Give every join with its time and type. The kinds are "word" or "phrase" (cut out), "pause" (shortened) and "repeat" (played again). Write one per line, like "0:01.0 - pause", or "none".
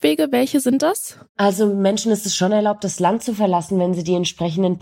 0:01.3 - pause